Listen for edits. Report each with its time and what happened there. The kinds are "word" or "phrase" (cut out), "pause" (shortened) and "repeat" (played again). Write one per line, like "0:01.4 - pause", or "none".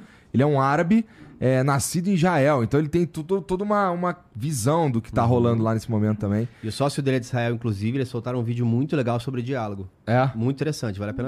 none